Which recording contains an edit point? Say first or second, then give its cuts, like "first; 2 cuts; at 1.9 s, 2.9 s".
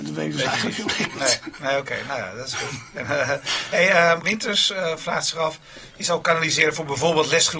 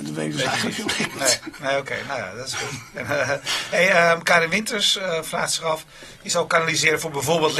first; 1 cut; at 4.2 s